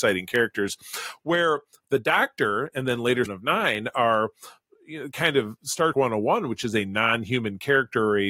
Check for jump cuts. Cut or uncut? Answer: cut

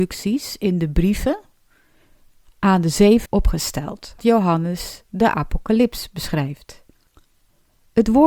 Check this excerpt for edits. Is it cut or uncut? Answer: cut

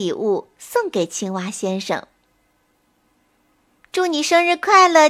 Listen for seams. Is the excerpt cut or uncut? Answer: uncut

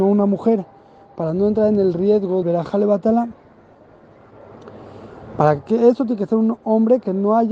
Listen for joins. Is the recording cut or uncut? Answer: cut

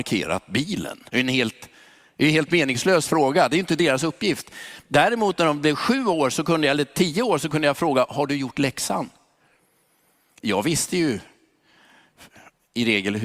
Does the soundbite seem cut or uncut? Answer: cut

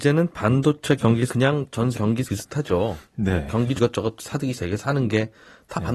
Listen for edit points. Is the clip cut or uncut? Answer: cut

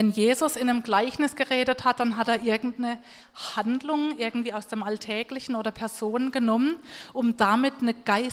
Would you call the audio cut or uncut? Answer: uncut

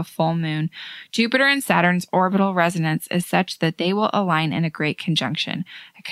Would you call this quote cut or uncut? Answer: uncut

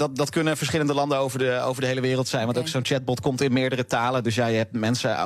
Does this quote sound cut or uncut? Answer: uncut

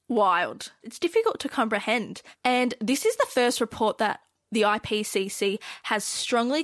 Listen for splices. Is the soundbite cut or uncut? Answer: uncut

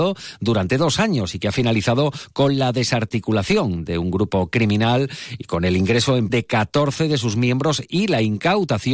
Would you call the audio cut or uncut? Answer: cut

